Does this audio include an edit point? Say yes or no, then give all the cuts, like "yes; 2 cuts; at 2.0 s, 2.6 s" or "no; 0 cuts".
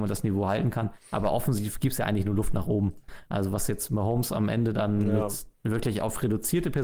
yes; 2 cuts; at 1.0 s, 5.5 s